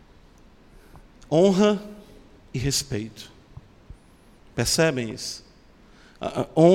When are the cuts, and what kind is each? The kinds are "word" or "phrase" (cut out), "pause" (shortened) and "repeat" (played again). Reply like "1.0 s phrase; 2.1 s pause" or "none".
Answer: none